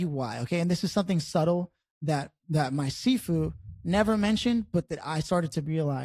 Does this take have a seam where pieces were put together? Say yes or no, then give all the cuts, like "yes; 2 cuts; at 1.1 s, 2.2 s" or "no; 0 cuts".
no; 0 cuts